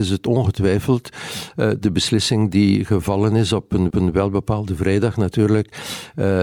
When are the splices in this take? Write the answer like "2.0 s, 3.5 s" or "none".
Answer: 3.9 s

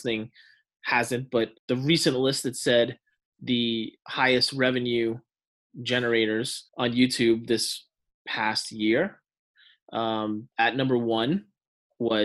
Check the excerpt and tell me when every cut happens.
1.6 s, 4.0 s, 6.7 s, 10.5 s

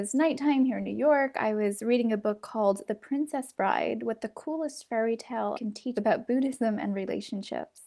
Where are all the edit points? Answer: 2.9 s, 5.5 s, 5.9 s

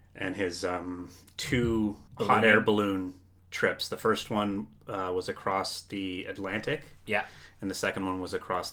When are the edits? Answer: 2.1 s

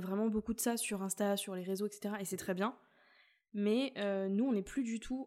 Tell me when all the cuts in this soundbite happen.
none

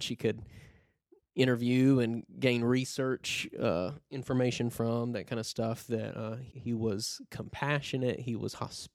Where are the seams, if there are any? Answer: 6.5 s

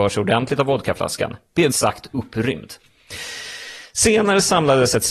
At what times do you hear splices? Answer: 1.7 s

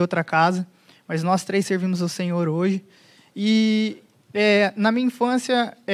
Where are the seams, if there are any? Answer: none

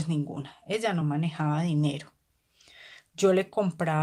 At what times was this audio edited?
none

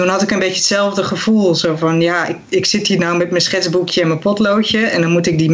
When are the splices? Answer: none

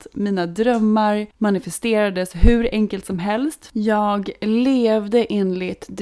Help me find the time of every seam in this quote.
1.3 s

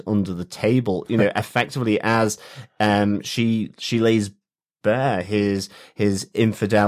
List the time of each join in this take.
none

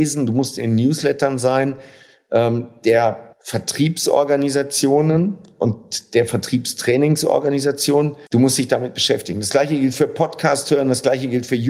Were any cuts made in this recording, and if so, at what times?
3.3 s, 8.3 s

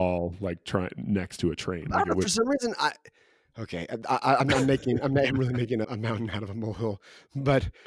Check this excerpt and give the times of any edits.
5.8 s

